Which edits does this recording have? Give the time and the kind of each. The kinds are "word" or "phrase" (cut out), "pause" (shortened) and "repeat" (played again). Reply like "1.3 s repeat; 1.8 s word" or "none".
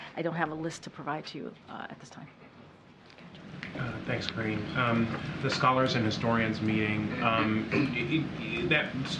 5.4 s phrase